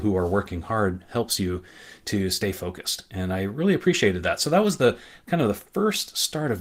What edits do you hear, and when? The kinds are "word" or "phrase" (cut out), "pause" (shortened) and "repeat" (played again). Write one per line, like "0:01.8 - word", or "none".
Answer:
none